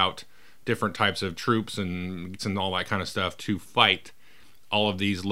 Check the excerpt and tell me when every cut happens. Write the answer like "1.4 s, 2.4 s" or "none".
2.4 s